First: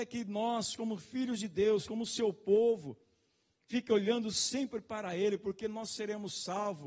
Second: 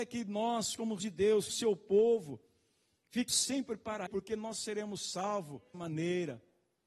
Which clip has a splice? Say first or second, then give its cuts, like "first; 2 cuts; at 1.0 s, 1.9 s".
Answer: second; 5 cuts; at 1.0 s, 1.5 s, 3.3 s, 4.1 s, 5.7 s